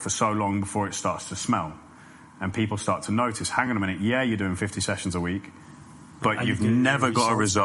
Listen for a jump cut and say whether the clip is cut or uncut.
uncut